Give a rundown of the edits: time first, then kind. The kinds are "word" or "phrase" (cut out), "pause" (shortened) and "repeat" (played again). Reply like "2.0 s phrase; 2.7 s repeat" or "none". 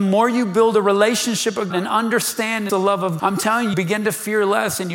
1.7 s word; 2.7 s word; 3.2 s word; 3.7 s word